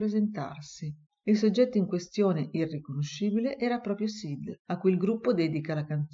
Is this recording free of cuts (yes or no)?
yes